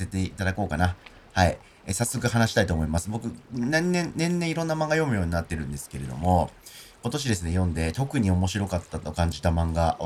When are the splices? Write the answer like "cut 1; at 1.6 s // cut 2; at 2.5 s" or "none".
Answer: none